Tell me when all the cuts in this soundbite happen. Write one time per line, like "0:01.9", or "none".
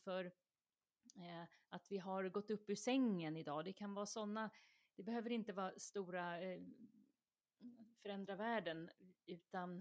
none